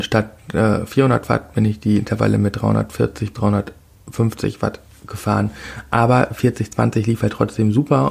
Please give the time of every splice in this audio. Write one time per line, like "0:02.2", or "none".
0:03.3